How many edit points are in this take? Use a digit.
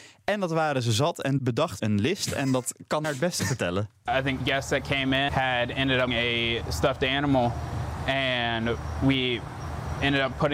7